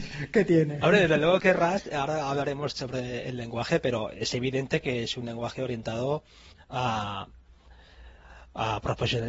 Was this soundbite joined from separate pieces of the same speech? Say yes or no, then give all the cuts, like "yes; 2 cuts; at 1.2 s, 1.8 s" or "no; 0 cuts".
no; 0 cuts